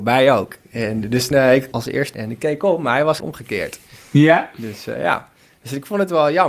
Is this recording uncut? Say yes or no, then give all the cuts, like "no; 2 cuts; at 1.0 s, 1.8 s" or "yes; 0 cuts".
no; 4 cuts; at 1.3 s, 1.7 s, 2.1 s, 3.2 s